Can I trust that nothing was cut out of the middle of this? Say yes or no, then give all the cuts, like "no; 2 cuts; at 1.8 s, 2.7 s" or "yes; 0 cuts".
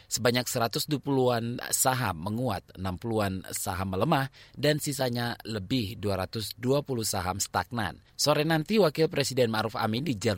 no; 1 cut; at 8.1 s